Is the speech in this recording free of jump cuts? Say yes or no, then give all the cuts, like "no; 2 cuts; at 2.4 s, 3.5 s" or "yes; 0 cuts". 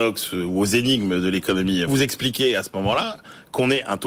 no; 1 cut; at 1.9 s